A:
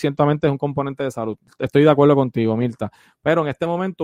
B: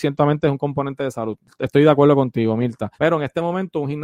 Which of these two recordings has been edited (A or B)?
B